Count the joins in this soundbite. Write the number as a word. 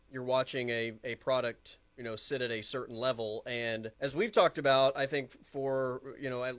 two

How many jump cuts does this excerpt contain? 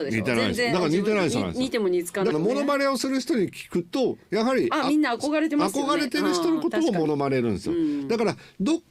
one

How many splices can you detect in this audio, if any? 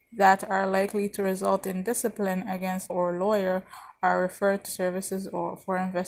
two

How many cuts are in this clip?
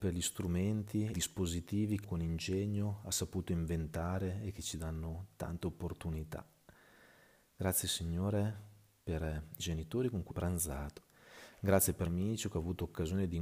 five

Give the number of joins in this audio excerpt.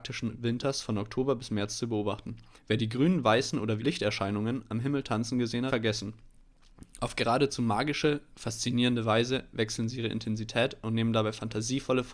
three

